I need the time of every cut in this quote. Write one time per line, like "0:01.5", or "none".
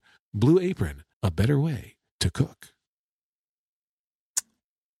0:01.1